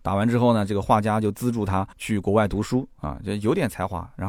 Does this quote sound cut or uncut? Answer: cut